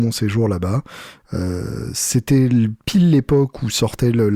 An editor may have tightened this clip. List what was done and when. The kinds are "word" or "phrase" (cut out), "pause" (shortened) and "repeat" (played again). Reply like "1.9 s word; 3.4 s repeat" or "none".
none